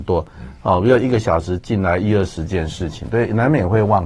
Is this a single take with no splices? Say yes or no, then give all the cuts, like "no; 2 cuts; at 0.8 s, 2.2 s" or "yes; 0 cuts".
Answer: yes; 0 cuts